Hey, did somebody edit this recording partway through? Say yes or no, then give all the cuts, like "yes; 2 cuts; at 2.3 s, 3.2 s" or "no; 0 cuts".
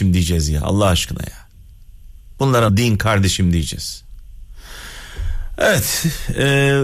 yes; 1 cut; at 2.7 s